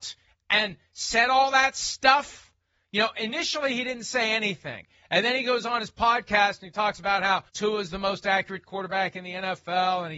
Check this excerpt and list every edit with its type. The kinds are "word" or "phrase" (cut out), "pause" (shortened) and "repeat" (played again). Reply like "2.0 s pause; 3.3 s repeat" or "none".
7.5 s pause